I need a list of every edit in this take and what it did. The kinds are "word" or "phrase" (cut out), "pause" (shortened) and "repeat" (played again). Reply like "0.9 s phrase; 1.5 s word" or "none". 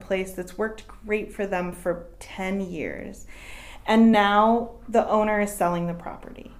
none